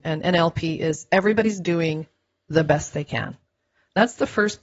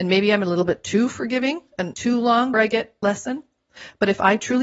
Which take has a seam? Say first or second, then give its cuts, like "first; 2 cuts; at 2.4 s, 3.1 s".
second; 3 cuts; at 1.9 s, 2.5 s, 3.0 s